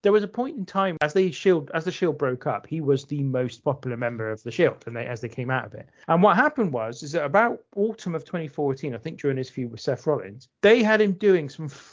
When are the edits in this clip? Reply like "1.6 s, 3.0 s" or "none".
none